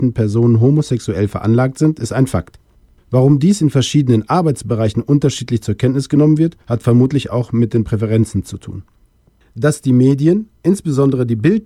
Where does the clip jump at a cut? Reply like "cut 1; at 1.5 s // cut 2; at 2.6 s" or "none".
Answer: cut 1; at 6.6 s